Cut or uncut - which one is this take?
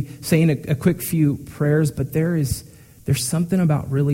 uncut